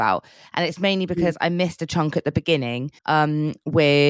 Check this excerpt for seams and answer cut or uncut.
cut